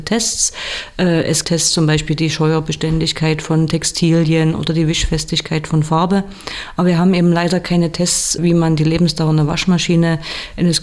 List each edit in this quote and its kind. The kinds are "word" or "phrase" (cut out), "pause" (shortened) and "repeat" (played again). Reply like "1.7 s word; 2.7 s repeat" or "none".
1.4 s word; 8.4 s word

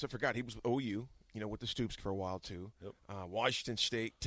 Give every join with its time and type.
2.0 s word; 3.0 s pause

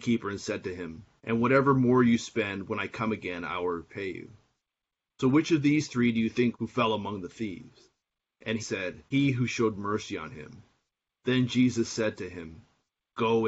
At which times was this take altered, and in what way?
1.2 s phrase; 6.5 s phrase; 8.6 s word; 9.1 s pause

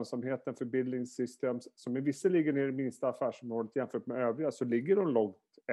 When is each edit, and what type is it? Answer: none

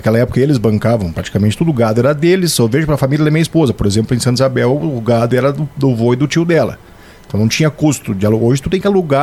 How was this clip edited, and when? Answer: none

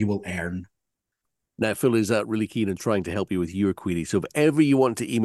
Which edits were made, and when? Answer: none

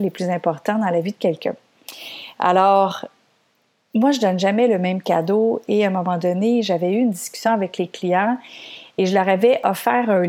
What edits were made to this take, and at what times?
none

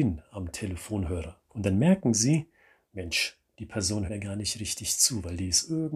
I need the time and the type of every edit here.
1.5 s pause; 4.1 s word

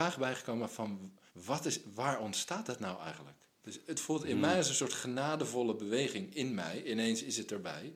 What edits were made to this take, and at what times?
1.3 s pause; 3.5 s pause

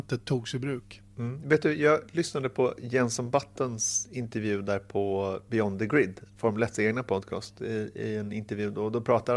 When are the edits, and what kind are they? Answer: none

